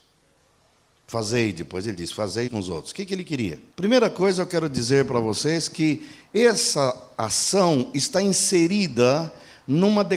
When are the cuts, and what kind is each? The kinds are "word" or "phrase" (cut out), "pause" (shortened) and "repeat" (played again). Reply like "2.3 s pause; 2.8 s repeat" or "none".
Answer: 2.5 s word; 3.7 s pause

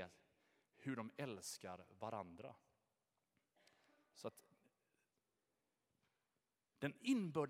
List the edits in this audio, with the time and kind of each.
none

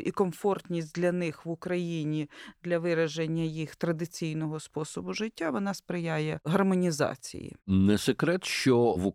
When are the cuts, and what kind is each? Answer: 7.6 s pause

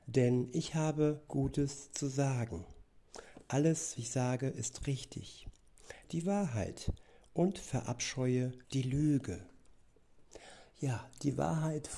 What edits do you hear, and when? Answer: 1.3 s word; 4.0 s word; 6.0 s phrase; 8.6 s pause

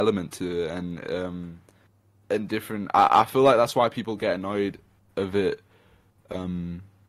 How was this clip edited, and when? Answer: none

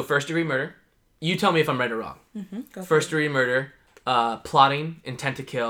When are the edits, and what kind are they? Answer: none

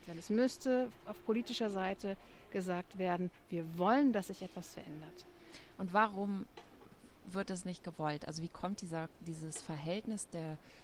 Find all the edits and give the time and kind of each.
none

